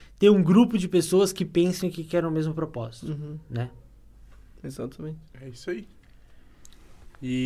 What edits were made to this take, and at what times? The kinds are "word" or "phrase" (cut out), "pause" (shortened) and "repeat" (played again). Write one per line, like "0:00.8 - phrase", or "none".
0:05.3 - pause